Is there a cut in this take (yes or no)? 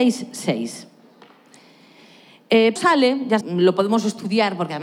yes